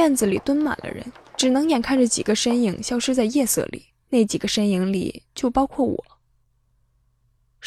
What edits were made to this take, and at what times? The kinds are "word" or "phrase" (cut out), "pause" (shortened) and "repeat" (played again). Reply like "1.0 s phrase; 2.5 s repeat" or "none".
none